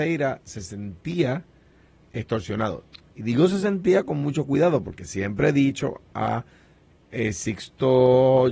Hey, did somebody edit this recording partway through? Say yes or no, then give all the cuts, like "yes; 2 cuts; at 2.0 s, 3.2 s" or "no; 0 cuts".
no; 0 cuts